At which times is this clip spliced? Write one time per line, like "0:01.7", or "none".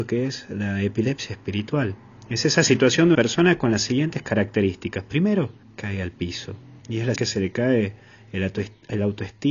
0:03.1
0:05.6
0:06.8
0:07.2